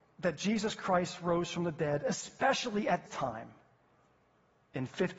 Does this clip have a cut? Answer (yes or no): yes